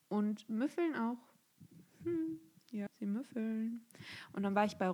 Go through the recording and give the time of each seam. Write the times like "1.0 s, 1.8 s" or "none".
2.9 s